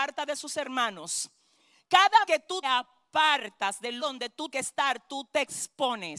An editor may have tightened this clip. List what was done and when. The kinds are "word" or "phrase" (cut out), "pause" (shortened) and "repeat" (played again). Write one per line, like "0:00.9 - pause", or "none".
0:02.3 - word
0:02.6 - word
0:04.0 - word
0:04.5 - word